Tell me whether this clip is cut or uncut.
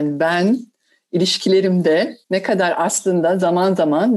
cut